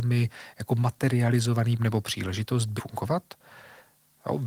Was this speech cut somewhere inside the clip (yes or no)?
yes